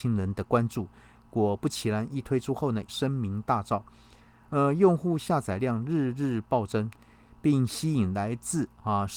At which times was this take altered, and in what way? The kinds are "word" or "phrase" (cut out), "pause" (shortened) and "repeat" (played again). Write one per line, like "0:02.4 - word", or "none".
0:02.9 - phrase